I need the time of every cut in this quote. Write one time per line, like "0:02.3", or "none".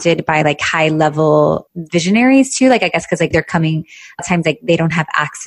0:01.7
0:03.3
0:04.2